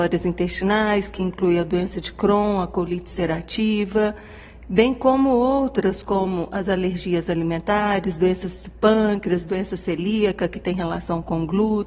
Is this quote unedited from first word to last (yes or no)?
yes